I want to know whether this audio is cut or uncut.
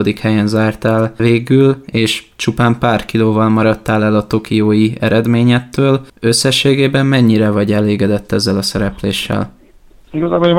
uncut